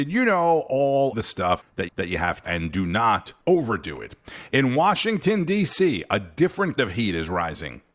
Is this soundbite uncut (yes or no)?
no